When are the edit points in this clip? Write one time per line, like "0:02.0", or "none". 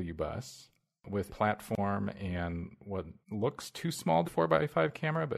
0:01.3
0:03.2
0:04.2